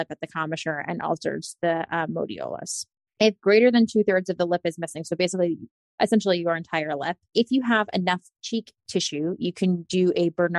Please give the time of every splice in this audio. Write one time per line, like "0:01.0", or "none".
none